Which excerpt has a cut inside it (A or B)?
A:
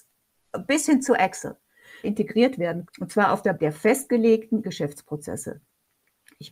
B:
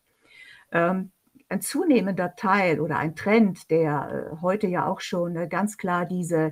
A